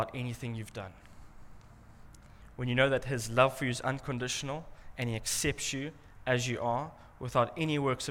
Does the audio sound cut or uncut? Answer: uncut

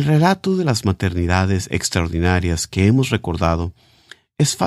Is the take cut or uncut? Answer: uncut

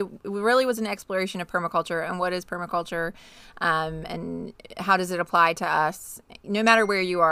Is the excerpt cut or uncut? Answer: uncut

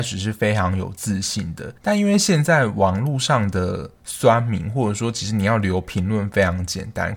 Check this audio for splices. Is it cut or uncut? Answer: cut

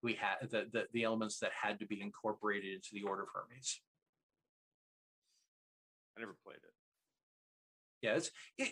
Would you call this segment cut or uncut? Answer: uncut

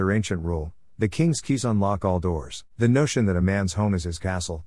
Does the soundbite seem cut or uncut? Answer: cut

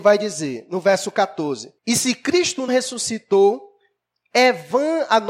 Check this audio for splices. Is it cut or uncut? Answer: cut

